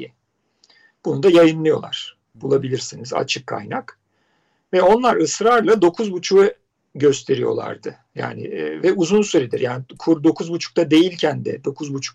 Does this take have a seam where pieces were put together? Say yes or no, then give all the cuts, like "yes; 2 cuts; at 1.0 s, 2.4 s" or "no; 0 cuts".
no; 0 cuts